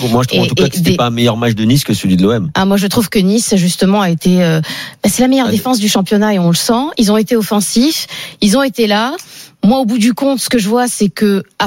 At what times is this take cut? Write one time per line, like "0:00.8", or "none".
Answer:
none